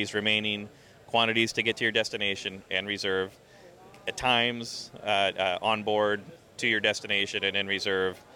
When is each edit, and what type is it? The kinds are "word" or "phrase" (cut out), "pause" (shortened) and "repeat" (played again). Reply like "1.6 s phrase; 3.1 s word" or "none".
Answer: none

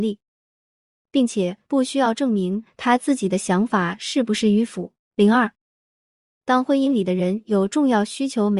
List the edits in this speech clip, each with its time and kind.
5.0 s pause

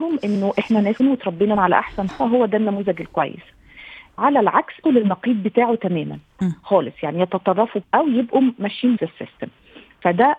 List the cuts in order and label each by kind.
1.0 s word; 1.5 s word; 2.1 s word; 4.2 s word; 4.8 s word; 6.4 s word; 7.8 s word; 9.0 s word

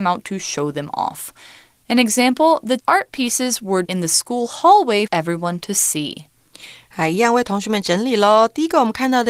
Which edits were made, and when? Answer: 2.8 s word; 3.8 s word; 5.1 s word

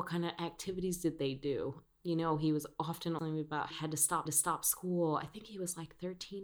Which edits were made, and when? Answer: 3.2 s word; 3.7 s phrase; 4.3 s repeat

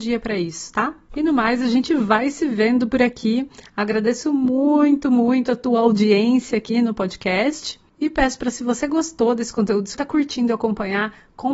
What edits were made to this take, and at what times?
9.9 s word

